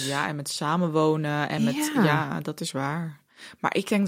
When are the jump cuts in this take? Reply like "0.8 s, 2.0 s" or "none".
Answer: none